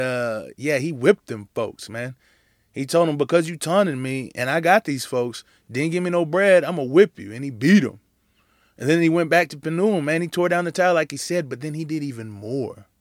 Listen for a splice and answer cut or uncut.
uncut